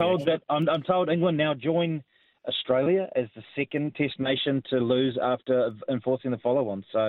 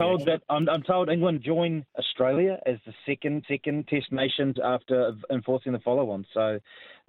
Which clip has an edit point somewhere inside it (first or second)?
second